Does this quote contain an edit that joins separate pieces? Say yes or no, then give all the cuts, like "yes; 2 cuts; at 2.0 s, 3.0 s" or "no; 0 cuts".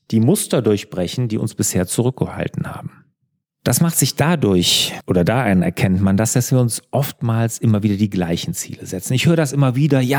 no; 0 cuts